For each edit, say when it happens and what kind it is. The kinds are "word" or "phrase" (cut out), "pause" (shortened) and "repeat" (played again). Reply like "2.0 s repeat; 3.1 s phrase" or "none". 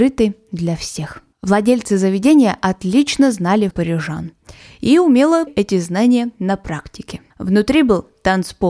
1.3 s pause; 3.7 s word; 5.5 s word; 7.3 s pause